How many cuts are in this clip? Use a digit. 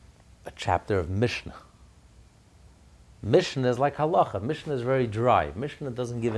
0